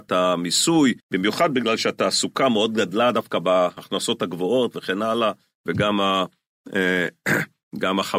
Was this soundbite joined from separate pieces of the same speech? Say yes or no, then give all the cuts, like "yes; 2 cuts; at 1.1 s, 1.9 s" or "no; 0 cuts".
yes; 1 cut; at 1.0 s